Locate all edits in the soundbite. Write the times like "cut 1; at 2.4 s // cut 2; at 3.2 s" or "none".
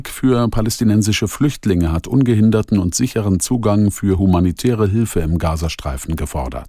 none